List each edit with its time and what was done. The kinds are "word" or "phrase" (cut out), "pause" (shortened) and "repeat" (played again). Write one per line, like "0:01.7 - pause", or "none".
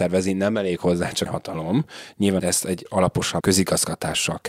0:01.3 - phrase
0:02.4 - phrase
0:02.9 - word
0:03.4 - word